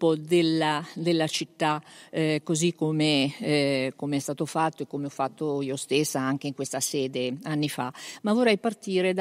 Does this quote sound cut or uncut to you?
uncut